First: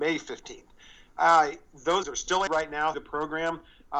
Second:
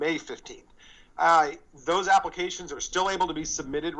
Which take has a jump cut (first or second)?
first